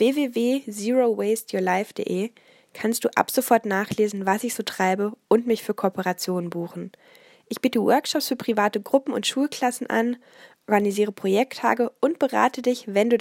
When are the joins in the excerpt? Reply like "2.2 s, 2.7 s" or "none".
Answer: none